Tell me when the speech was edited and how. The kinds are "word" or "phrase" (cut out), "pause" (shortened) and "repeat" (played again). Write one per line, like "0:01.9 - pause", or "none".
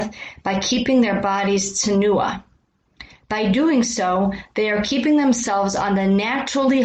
none